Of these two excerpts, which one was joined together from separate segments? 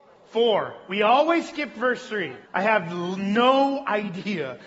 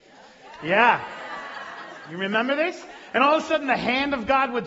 first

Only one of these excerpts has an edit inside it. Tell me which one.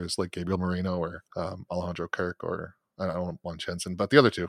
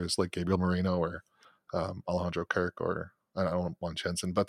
first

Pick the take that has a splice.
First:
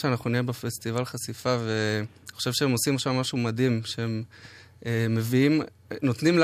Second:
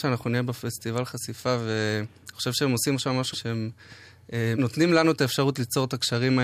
second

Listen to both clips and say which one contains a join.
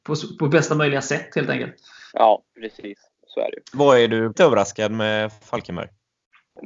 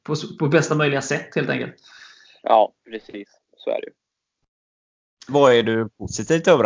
first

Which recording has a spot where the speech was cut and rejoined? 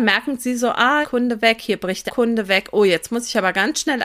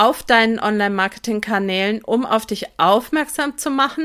first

